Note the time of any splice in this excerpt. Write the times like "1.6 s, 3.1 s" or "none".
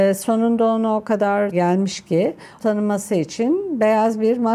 1.5 s, 2.6 s